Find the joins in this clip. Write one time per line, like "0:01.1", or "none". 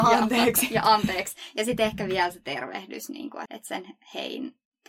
0:03.5